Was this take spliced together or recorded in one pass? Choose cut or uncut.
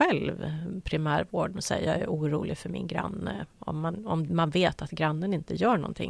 uncut